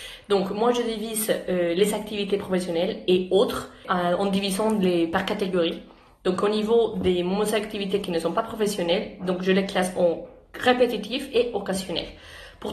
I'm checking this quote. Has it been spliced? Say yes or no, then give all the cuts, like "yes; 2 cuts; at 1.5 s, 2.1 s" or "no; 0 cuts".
no; 0 cuts